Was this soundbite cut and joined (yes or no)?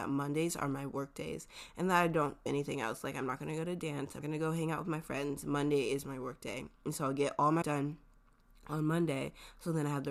yes